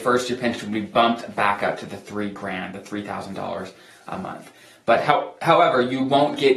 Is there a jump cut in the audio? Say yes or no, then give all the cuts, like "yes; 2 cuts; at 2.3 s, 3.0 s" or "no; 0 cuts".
no; 0 cuts